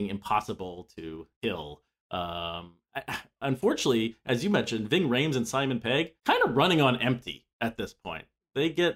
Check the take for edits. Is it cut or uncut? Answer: cut